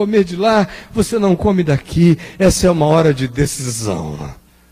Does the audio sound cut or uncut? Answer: uncut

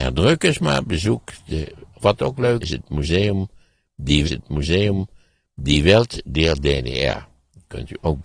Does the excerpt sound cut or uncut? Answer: cut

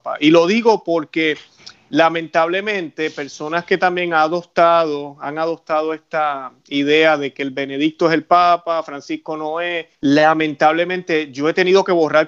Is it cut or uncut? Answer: cut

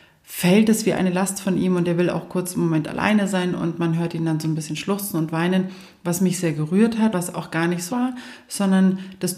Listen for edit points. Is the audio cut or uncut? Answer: cut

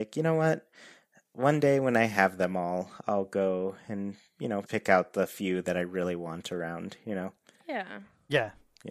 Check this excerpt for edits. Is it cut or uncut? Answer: cut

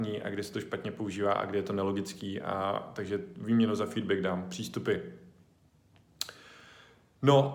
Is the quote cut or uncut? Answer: uncut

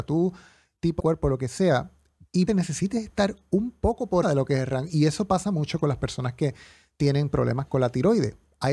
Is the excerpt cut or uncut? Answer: cut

